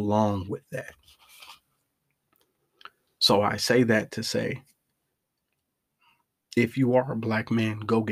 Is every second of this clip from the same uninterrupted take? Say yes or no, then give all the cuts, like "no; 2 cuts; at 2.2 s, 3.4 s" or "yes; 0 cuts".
yes; 0 cuts